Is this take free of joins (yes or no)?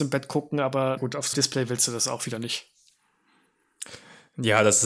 no